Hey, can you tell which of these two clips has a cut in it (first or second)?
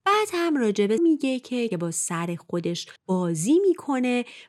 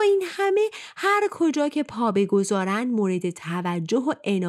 first